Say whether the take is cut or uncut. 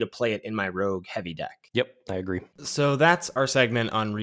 uncut